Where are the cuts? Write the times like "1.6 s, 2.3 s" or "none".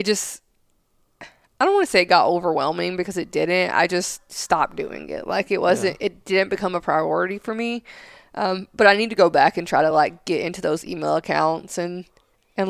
none